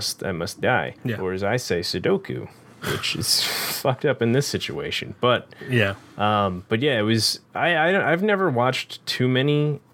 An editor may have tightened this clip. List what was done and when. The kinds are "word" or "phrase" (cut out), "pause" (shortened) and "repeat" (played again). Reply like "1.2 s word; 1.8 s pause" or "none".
1.0 s pause; 7.5 s pause